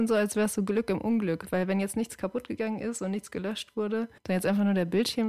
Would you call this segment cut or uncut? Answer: cut